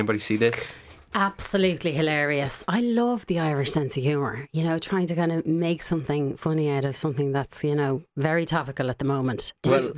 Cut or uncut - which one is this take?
uncut